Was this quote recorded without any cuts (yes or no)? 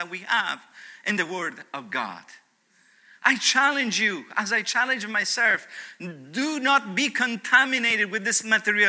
yes